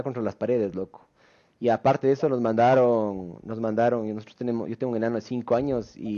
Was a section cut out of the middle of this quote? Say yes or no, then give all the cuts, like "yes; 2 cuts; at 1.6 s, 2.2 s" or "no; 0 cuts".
no; 0 cuts